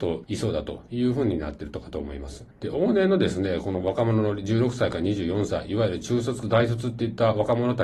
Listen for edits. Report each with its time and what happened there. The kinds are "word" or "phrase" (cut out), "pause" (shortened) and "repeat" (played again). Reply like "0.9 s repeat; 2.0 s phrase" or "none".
6.4 s phrase